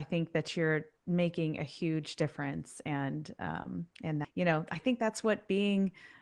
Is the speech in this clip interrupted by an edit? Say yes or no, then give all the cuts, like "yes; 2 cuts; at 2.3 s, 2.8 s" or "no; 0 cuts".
yes; 1 cut; at 4.2 s